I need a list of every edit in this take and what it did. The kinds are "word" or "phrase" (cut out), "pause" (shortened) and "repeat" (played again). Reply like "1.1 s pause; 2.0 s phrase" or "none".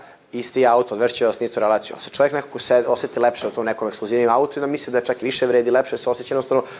5.2 s word